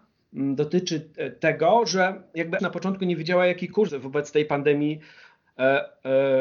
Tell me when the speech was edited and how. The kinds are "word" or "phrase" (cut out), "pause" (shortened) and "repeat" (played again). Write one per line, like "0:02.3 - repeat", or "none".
0:02.6 - phrase
0:03.9 - word